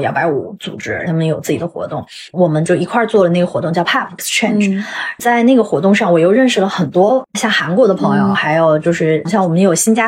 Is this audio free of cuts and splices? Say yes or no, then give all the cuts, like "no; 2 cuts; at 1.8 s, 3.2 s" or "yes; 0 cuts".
no; 3 cuts; at 3.8 s, 4.2 s, 5.2 s